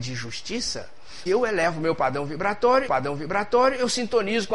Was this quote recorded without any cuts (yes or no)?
no